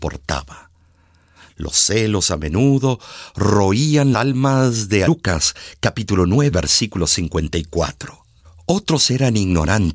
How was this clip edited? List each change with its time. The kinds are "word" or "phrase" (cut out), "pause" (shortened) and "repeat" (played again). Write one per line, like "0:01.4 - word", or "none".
0:04.1 - word
0:05.1 - phrase
0:06.5 - word
0:08.4 - pause